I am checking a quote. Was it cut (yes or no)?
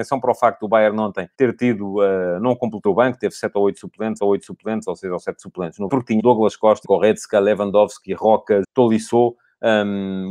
yes